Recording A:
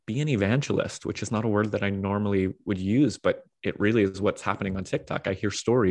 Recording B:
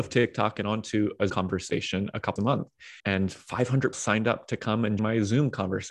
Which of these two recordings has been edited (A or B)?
B